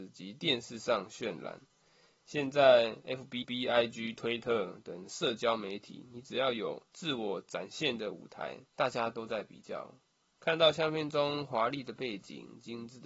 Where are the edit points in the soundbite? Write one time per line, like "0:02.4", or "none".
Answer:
0:03.4
0:06.9
0:08.7